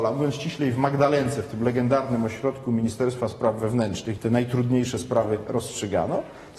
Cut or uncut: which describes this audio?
cut